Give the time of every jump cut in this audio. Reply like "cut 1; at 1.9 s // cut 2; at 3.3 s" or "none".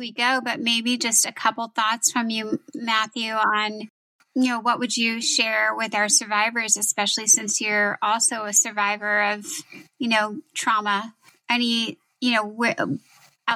none